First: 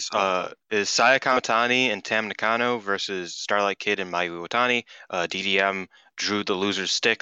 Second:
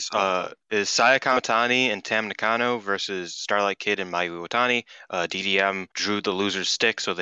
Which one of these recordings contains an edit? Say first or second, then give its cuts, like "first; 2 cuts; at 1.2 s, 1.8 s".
second; 1 cut; at 5.9 s